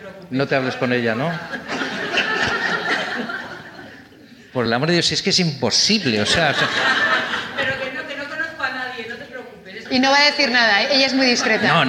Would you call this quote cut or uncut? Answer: uncut